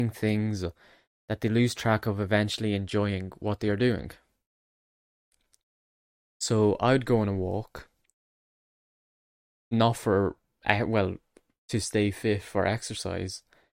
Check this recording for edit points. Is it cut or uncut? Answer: uncut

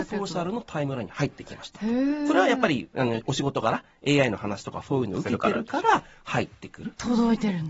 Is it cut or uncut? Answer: uncut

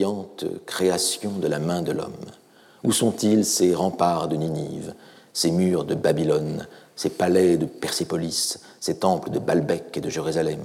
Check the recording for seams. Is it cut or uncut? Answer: uncut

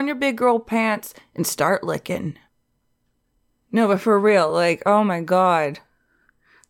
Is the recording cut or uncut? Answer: uncut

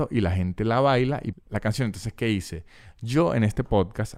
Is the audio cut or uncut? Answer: cut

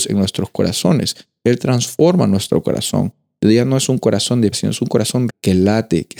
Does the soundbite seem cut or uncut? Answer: cut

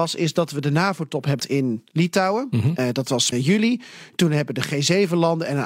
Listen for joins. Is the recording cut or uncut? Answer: cut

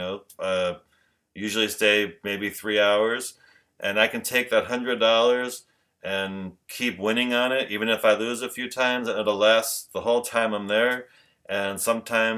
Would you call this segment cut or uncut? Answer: uncut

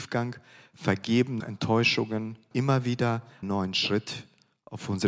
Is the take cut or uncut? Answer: cut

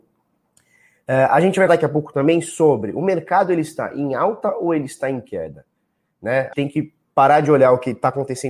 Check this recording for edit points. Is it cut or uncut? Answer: cut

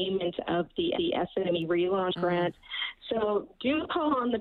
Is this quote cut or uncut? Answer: cut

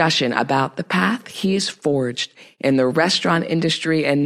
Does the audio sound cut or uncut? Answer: uncut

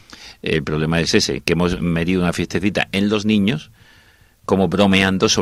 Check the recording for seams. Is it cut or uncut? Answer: uncut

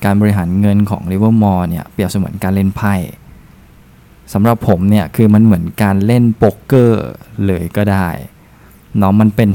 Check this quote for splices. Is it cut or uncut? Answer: uncut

